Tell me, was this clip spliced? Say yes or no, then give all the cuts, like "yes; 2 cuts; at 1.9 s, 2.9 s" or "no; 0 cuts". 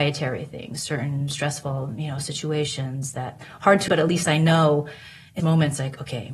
yes; 2 cuts; at 3.9 s, 5.4 s